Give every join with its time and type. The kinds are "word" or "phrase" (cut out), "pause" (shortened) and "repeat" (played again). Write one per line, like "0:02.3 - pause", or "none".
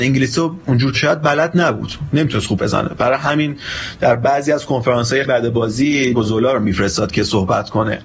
0:00.9 - word
0:02.6 - word
0:05.2 - word
0:06.1 - word

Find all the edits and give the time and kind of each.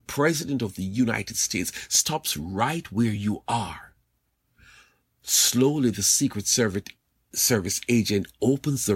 none

